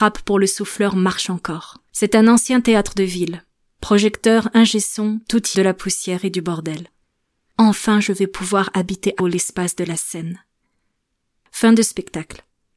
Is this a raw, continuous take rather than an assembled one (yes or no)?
no